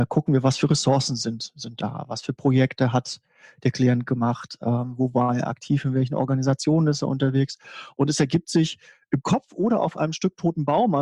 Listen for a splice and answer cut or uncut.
uncut